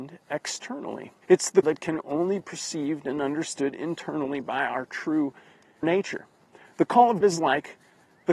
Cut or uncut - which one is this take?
cut